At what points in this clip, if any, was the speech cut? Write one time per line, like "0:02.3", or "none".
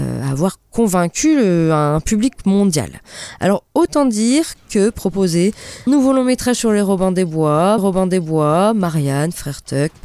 0:05.9
0:07.8